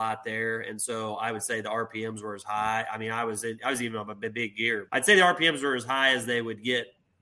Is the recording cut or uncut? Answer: cut